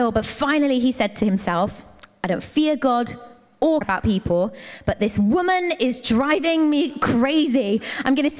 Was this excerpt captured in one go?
no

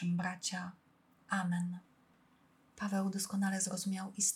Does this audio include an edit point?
no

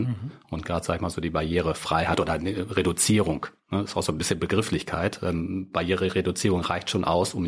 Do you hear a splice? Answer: no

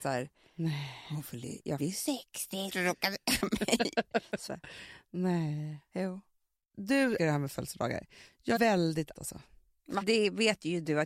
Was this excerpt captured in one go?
no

